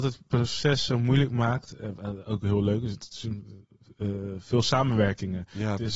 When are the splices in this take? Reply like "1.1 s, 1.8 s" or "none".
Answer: none